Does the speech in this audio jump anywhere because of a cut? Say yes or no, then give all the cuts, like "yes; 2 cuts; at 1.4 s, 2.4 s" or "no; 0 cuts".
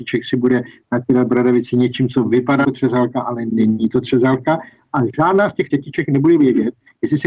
yes; 2 cuts; at 2.6 s, 5.7 s